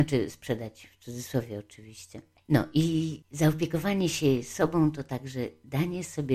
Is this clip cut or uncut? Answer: uncut